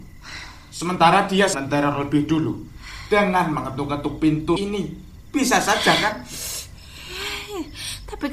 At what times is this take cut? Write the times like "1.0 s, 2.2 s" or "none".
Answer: 1.5 s, 4.6 s